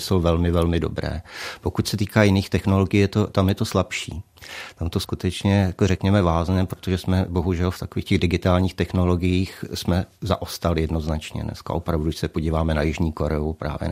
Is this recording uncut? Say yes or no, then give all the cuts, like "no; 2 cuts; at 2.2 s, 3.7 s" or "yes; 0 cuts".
yes; 0 cuts